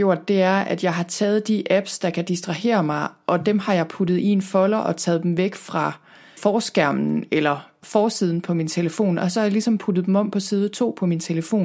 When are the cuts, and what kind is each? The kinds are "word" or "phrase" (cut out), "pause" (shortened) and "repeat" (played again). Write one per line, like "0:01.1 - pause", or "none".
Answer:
none